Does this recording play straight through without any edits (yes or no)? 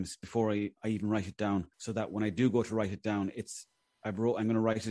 no